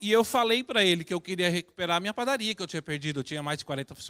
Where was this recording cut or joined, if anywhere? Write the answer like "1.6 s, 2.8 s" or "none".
none